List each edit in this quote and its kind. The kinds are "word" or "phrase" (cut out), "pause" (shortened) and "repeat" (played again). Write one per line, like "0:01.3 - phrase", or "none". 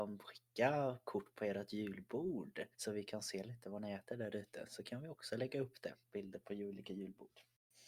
0:02.7 - pause